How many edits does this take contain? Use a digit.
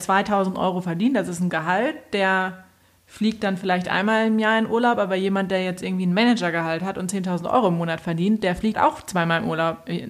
2